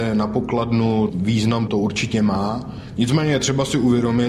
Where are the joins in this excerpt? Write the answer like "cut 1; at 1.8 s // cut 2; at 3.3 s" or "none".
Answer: cut 1; at 1.1 s // cut 2; at 1.7 s